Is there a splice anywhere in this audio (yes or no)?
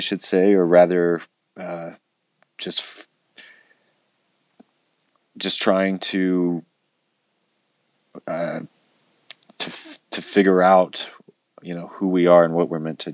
no